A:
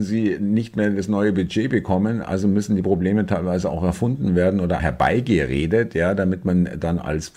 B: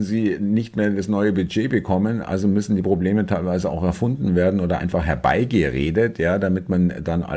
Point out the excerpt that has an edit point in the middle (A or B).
A